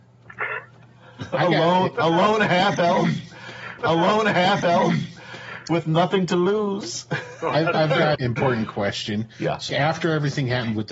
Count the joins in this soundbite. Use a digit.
3